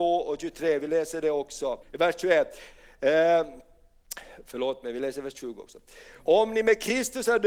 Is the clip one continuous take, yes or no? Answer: no